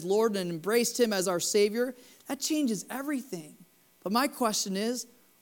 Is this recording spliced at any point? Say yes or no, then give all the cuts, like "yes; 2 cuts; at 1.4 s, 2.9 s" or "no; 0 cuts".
no; 0 cuts